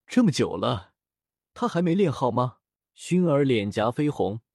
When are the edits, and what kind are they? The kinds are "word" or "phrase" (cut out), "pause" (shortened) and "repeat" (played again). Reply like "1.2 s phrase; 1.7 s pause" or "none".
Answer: 2.8 s pause